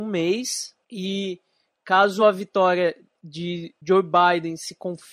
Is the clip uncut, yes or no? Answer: yes